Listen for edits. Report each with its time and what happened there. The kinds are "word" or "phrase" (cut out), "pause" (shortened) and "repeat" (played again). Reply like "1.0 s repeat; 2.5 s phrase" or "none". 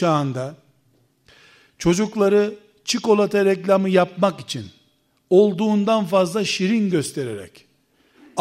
none